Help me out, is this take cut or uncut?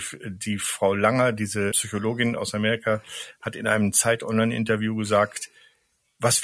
cut